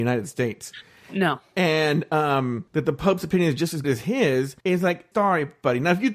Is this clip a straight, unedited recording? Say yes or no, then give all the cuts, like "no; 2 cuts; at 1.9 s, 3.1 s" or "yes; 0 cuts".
no; 4 cuts; at 2.7 s, 3.8 s, 4.6 s, 5.1 s